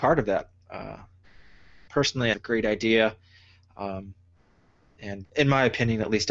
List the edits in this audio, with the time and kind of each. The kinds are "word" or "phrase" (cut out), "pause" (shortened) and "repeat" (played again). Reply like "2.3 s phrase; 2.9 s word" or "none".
2.3 s phrase; 5.2 s word